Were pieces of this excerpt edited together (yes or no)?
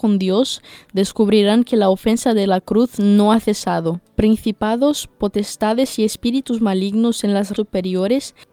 yes